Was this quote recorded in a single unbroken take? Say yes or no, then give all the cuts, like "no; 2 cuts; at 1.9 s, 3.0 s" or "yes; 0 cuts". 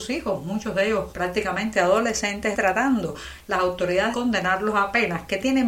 no; 3 cuts; at 1.1 s, 2.5 s, 4.1 s